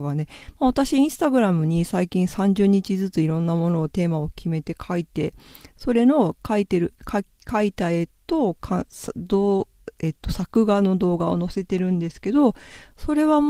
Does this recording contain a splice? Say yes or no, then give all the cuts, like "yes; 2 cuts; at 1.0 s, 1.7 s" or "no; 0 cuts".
no; 0 cuts